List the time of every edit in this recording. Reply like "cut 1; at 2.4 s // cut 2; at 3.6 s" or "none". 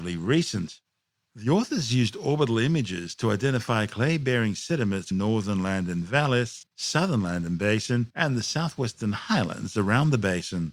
cut 1; at 5.1 s